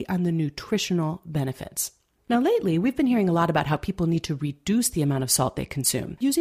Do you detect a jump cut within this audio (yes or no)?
no